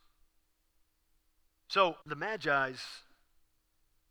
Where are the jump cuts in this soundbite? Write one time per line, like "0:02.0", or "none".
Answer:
0:02.0

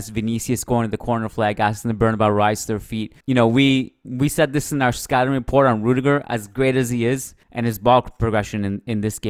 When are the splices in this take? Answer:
0:03.2
0:07.4

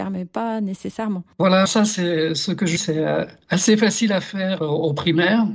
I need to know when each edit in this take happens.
0:01.7
0:02.8
0:04.6

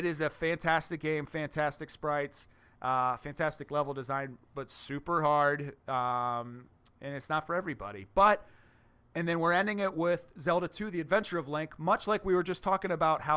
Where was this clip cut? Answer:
none

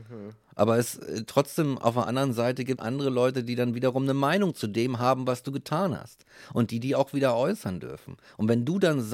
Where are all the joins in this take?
0:02.8

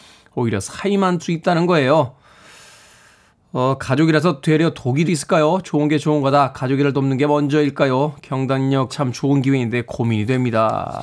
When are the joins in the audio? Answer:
0:01.2
0:05.1
0:08.9

